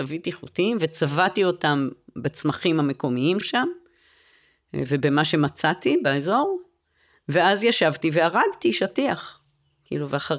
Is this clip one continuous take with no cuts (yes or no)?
no